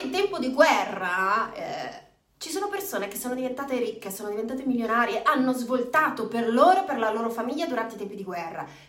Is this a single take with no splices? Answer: yes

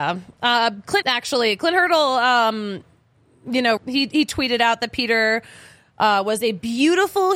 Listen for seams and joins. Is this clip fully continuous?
no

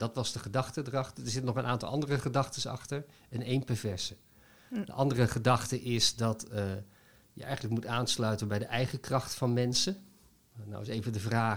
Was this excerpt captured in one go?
yes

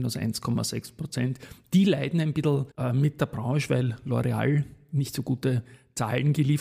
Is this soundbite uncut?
no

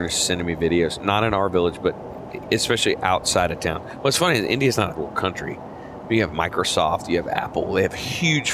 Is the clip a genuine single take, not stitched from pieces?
no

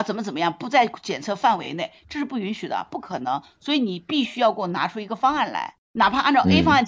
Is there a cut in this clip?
yes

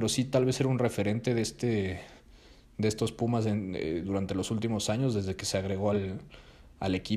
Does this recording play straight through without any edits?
yes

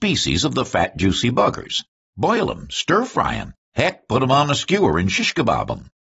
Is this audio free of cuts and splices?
yes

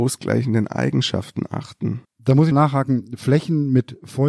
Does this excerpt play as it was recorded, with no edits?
no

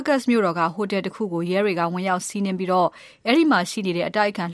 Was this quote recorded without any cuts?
yes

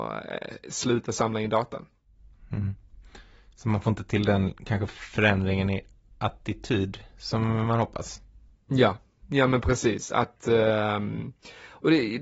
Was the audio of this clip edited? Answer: no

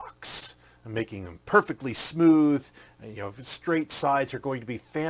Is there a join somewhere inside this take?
no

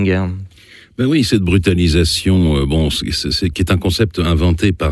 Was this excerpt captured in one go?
yes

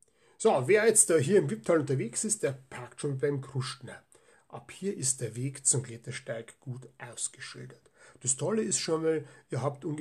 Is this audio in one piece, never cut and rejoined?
yes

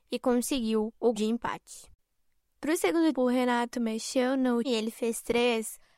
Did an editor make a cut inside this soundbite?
yes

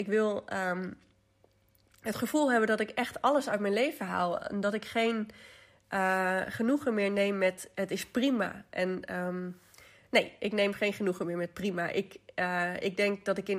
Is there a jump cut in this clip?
no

